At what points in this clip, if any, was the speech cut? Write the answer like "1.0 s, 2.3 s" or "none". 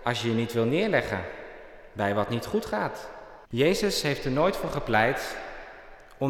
3.4 s